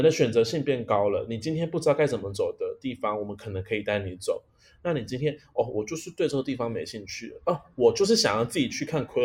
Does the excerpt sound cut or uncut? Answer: uncut